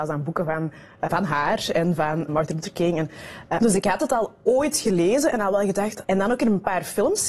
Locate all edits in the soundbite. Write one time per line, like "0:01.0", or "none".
0:01.1
0:02.3
0:03.6
0:06.0